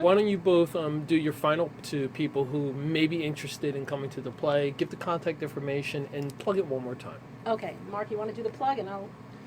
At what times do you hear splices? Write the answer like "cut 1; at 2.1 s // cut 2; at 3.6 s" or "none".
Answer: cut 1; at 1.8 s